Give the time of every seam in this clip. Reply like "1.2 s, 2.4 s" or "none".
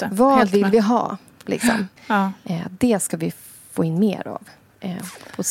2.0 s